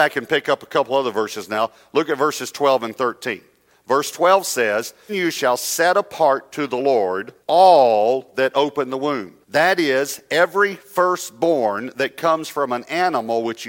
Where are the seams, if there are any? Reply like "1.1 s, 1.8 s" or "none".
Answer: 5.1 s, 7.4 s, 9.4 s